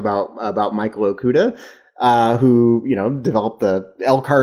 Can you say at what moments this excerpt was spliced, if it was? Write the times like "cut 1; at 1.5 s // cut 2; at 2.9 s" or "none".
none